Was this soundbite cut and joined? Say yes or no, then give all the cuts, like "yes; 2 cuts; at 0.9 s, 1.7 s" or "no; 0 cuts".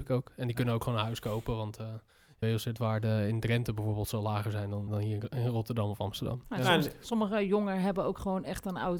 yes; 2 cuts; at 2.4 s, 4.9 s